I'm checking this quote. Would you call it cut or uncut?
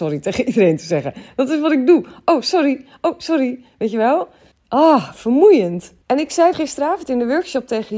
cut